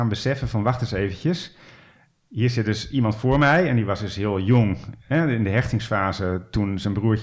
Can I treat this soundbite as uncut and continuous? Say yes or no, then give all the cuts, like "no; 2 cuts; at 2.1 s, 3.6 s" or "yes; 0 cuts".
yes; 0 cuts